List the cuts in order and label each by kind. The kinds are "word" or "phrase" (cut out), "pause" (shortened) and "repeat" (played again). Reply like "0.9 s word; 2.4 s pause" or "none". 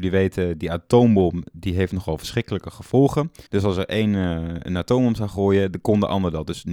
3.5 s pause